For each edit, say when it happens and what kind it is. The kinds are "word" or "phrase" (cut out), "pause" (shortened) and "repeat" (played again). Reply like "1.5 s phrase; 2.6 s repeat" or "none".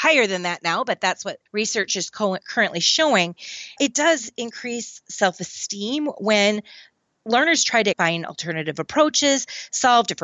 1.5 s pause; 2.4 s pause; 3.8 s word; 7.9 s word